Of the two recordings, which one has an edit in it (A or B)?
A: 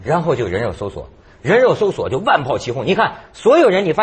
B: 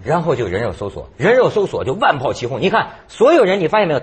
B